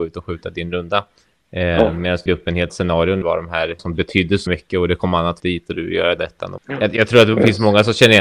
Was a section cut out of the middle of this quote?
yes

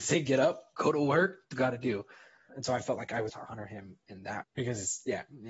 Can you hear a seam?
yes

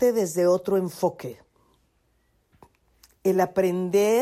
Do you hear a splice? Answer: no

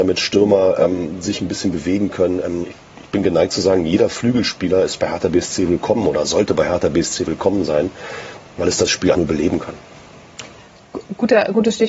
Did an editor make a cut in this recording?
yes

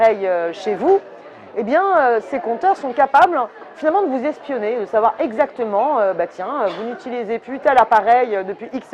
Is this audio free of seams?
yes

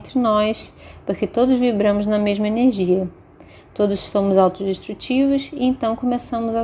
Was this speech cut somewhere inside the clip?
no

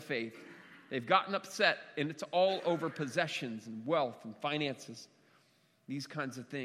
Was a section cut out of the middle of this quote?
no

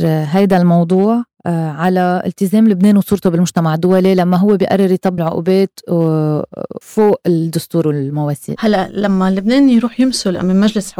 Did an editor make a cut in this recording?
yes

